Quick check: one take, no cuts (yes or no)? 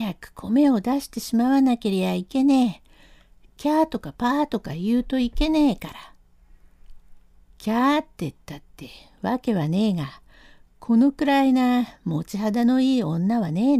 no